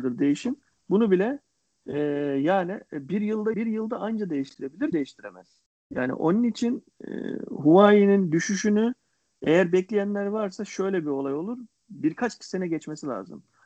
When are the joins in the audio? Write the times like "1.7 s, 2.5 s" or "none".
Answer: 3.5 s, 4.9 s